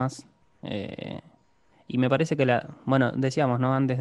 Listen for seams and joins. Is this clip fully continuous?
yes; 0 cuts

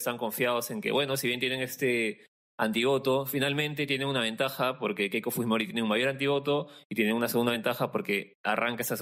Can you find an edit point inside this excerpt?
no; 0 cuts

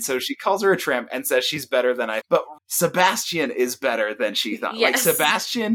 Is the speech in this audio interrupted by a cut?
yes; 2 cuts; at 2.2 s, 2.6 s

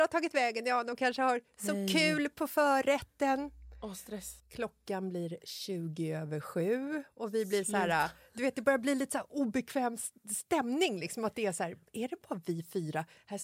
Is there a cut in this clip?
yes; 1 cut; at 4.4 s

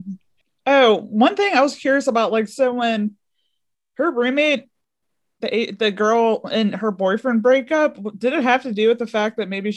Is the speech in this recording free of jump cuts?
yes; 0 cuts

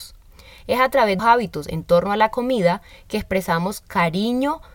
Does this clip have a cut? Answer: yes; 1 cut; at 1.2 s

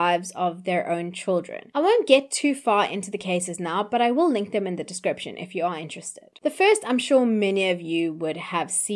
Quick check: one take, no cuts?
yes; 0 cuts

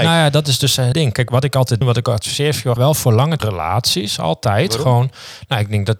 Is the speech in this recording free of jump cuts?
no; 5 cuts; at 0.9 s, 1.3 s, 1.8 s, 2.8 s, 3.4 s

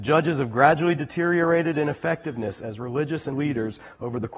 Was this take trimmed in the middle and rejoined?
yes; 1 cut; at 3.3 s

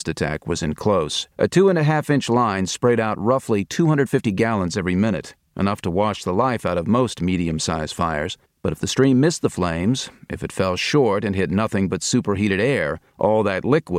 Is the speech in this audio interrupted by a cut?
yes; 3 cuts; at 1.3 s, 8.5 s, 13.1 s

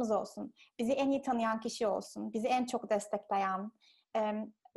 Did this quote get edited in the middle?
no; 0 cuts

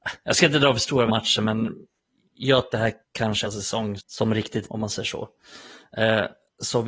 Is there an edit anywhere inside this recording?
yes; 6 cuts; at 1.1 s, 2.7 s, 3.0 s, 3.4 s, 4.0 s, 4.7 s

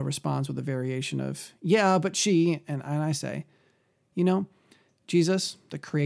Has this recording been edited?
no; 0 cuts

